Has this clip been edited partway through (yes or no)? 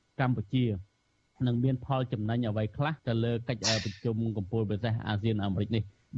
yes